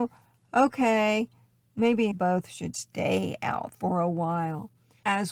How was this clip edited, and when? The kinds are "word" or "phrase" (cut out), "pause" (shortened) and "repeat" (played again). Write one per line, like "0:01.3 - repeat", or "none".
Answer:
0:02.1 - word
0:02.7 - word
0:03.7 - phrase